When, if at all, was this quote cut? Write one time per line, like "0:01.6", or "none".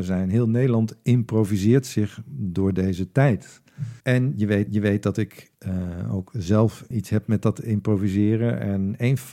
0:04.0
0:04.7
0:05.5
0:06.9